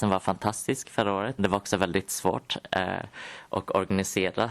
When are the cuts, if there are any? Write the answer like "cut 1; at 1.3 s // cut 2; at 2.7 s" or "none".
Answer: cut 1; at 1.4 s